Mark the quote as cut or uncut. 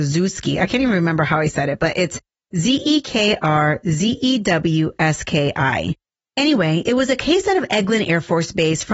uncut